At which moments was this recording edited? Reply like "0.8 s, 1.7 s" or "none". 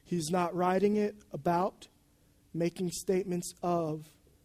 none